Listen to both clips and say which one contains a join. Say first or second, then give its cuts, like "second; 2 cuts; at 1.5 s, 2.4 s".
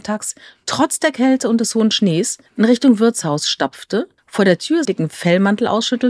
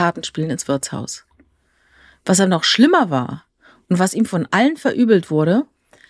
first; 3 cuts; at 2.5 s, 4.2 s, 4.8 s